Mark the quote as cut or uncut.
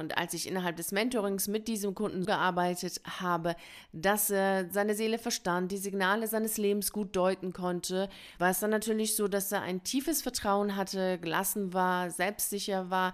cut